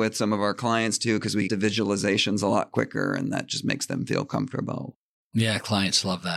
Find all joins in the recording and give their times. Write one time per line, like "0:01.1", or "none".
0:01.5